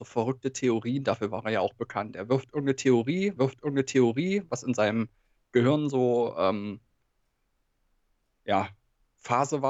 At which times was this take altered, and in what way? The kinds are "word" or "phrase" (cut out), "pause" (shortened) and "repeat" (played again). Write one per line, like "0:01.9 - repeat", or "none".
0:03.4 - repeat